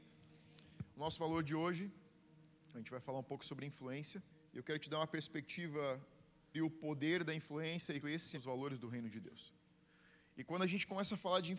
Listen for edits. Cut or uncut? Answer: cut